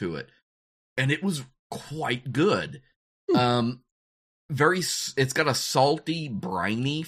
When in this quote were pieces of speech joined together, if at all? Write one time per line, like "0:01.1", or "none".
none